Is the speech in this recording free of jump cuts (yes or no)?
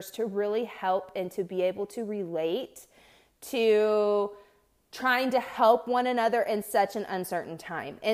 yes